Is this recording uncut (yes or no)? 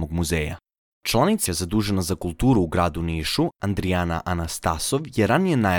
no